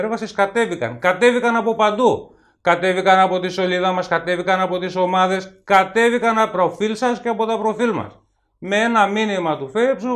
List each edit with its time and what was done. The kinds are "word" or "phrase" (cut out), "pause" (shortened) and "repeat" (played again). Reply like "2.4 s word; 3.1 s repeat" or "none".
6.5 s word